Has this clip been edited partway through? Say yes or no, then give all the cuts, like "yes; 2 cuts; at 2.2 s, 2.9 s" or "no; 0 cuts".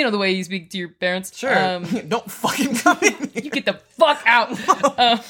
no; 0 cuts